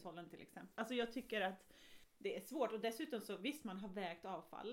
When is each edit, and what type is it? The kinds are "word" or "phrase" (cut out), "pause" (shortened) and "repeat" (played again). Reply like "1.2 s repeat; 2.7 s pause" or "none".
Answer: none